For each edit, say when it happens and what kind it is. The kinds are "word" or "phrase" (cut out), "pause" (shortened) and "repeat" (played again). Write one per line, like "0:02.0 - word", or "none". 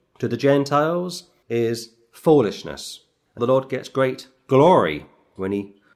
0:01.4 - word
0:03.4 - word